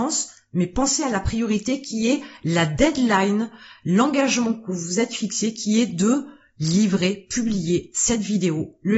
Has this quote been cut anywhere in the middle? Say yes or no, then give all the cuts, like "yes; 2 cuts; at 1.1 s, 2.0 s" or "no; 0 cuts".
no; 0 cuts